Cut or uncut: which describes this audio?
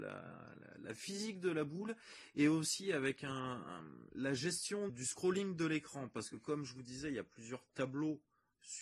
cut